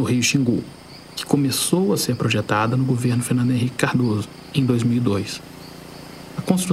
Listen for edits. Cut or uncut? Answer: uncut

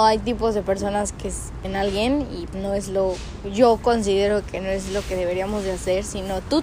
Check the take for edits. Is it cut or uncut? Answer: cut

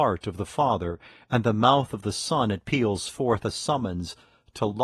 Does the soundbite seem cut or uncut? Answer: uncut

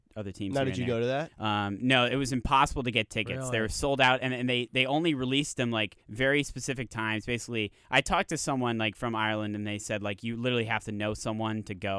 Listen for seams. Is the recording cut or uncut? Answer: cut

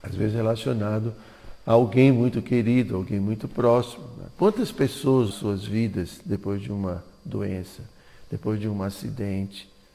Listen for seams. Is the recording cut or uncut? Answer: cut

